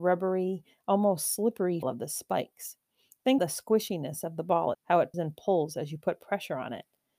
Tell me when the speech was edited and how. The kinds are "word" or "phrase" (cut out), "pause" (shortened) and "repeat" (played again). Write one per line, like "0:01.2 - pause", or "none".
0:01.8 - word
0:03.4 - word
0:04.7 - word
0:05.1 - word

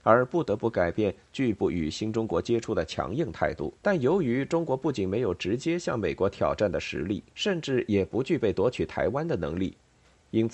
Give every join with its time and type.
0:03.8 - pause
0:07.3 - pause

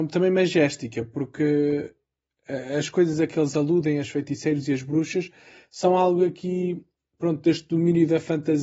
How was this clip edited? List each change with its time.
none

